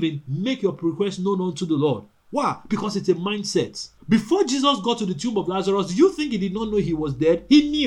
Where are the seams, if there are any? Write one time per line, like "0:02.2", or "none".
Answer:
0:04.0